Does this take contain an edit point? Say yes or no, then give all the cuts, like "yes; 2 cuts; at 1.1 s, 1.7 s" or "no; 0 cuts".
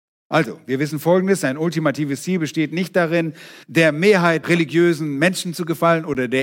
yes; 2 cuts; at 3.6 s, 4.4 s